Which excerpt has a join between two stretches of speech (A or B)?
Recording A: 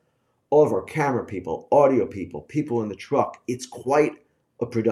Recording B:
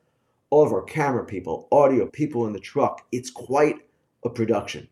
B